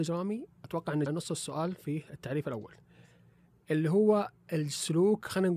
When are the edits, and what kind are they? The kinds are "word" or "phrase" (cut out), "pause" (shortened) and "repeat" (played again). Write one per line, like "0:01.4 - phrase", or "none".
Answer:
0:01.1 - word